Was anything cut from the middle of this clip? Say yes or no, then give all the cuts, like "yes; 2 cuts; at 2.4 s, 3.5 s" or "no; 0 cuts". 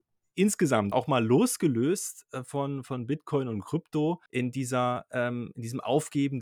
yes; 2 cuts; at 0.9 s, 4.3 s